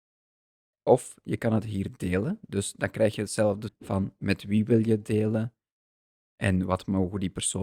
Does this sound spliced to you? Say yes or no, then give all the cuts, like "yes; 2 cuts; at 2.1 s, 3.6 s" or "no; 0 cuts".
no; 0 cuts